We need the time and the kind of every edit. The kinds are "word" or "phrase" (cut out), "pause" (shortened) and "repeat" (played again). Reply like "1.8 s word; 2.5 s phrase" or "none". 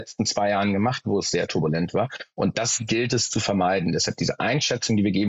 none